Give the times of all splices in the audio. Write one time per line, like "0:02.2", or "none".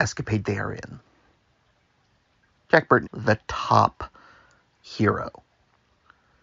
0:03.0